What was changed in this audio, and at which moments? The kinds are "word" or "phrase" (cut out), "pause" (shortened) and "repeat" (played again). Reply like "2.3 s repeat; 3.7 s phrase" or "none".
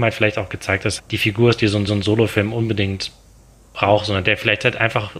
1.0 s phrase; 1.9 s repeat